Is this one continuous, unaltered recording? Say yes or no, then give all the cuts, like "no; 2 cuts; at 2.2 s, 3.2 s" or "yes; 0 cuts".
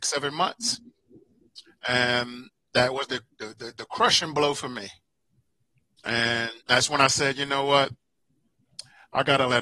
no; 1 cut; at 6.6 s